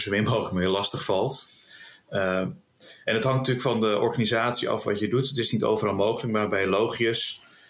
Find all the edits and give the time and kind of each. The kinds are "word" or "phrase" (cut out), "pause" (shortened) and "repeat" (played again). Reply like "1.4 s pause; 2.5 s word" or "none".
none